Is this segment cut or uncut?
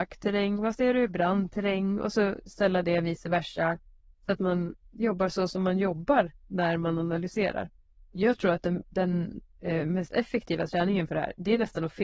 uncut